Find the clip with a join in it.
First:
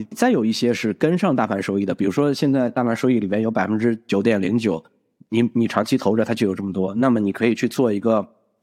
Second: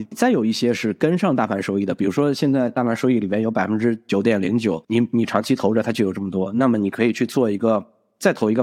second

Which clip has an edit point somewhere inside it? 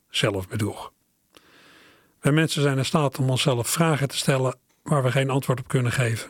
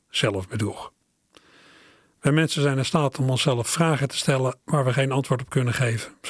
second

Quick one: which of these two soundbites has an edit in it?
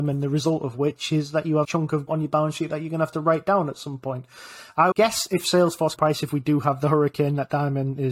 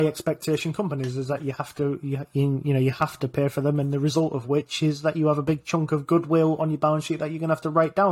first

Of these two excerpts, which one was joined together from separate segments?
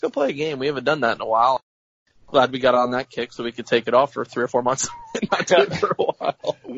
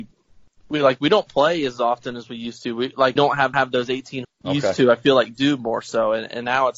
second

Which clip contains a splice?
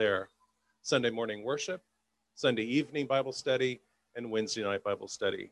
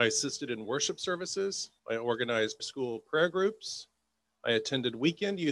second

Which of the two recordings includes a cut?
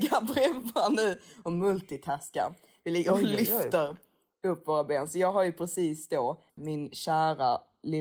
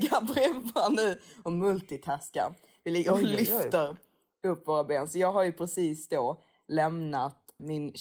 first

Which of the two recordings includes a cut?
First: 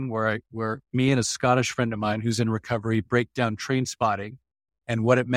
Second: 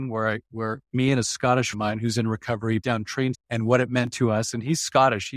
second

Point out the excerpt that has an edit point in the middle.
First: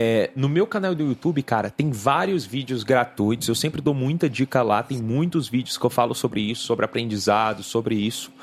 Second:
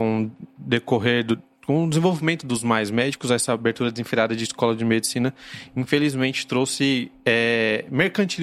second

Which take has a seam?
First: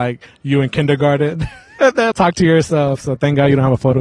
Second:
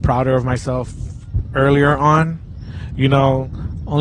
first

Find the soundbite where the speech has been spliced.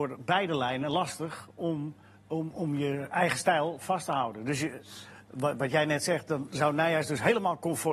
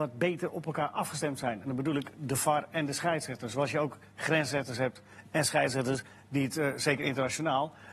first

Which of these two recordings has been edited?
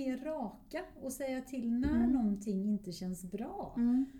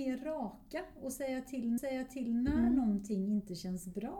second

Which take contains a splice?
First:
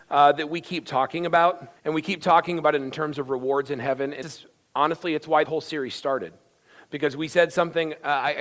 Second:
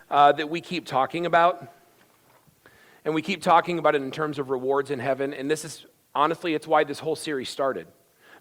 first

